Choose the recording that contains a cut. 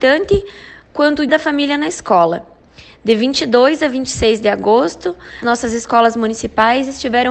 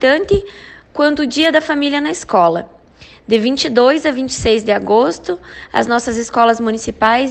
first; 2 cuts; at 1.3 s, 5.4 s

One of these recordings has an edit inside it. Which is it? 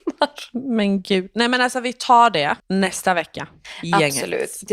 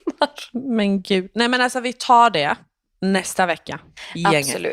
first; 1 cut; at 2.6 s

